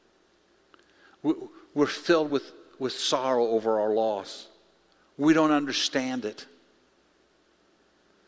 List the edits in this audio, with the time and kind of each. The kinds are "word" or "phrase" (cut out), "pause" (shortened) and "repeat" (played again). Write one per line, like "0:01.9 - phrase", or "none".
none

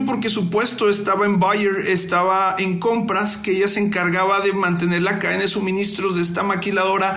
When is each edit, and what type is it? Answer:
none

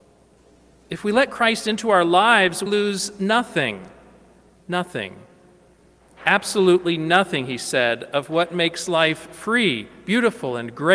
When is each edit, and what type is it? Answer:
0:02.7 - word

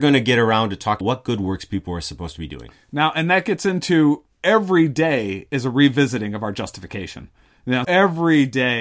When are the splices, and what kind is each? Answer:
0:01.0 - word
0:07.8 - word

